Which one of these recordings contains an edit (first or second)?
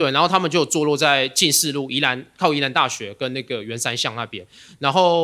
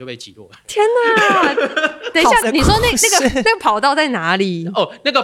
second